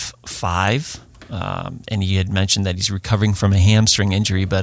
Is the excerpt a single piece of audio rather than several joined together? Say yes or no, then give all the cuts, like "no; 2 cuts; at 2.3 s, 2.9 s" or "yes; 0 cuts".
yes; 0 cuts